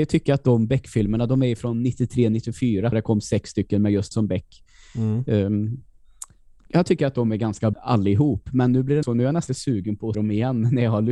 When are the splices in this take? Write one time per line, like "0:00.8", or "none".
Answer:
0:02.9
0:04.1
0:07.7
0:09.0
0:09.5
0:10.1